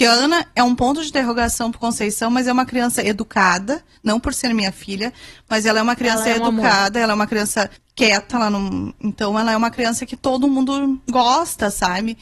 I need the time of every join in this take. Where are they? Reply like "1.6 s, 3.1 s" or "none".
7.8 s